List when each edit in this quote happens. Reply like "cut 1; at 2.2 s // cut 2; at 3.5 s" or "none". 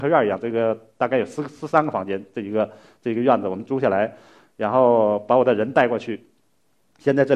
none

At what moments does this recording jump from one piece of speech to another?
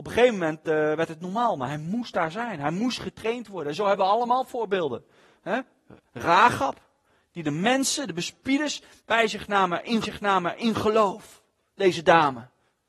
cut 1; at 10.0 s

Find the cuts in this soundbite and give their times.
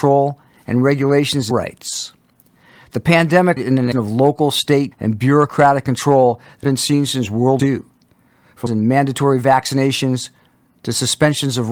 cut 1; at 1.5 s // cut 2; at 3.6 s // cut 3; at 3.9 s // cut 4; at 4.9 s // cut 5; at 6.6 s // cut 6; at 7.6 s // cut 7; at 8.7 s

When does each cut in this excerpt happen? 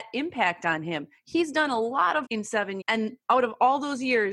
cut 1; at 2.3 s // cut 2; at 2.8 s

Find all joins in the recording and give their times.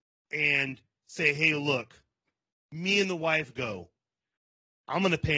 none

